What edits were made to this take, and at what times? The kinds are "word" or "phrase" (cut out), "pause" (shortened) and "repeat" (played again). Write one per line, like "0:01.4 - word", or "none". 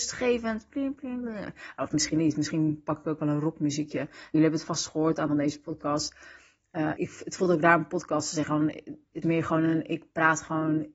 0:04.3 - word
0:05.3 - word
0:07.0 - word
0:09.2 - word